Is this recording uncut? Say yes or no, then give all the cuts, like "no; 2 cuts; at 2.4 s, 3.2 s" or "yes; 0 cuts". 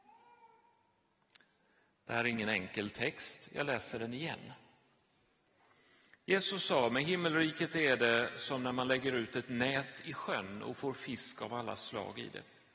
yes; 0 cuts